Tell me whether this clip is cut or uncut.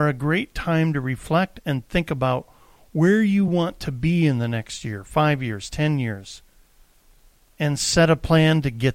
uncut